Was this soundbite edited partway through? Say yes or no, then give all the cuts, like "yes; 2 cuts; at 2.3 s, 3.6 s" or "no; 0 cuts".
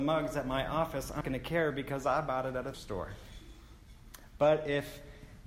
yes; 2 cuts; at 1.2 s, 2.7 s